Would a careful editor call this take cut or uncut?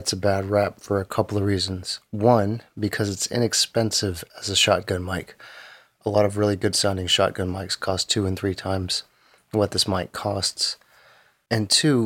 uncut